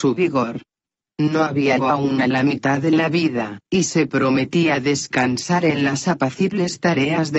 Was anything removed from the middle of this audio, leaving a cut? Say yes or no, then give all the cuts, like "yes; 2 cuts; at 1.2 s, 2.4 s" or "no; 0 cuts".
yes; 2 cuts; at 1.8 s, 2.8 s